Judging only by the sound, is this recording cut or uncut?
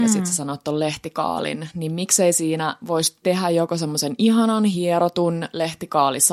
uncut